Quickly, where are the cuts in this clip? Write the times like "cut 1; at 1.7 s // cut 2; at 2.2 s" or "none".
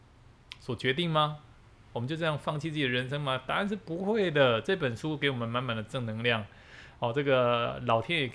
none